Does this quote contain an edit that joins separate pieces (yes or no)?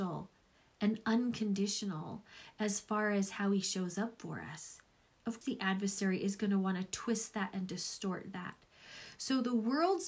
yes